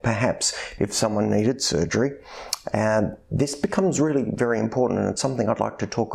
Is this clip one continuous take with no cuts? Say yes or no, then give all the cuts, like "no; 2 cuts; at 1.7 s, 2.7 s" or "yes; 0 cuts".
yes; 0 cuts